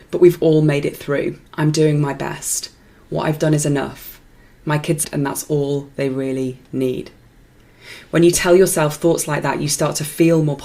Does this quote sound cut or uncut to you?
cut